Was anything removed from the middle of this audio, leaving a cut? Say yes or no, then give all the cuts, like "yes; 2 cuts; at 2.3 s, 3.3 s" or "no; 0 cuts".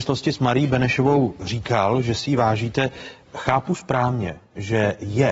no; 0 cuts